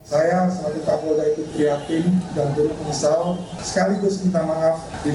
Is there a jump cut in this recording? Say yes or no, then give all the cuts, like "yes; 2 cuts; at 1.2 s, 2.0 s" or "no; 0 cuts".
no; 0 cuts